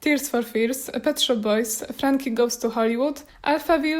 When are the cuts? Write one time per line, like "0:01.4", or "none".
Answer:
none